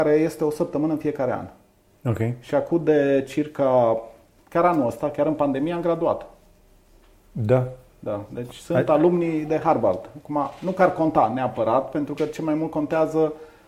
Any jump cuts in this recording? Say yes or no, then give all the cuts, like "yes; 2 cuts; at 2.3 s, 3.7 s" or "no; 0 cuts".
no; 0 cuts